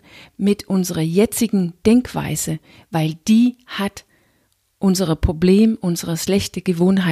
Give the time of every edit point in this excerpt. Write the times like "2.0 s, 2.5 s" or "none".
none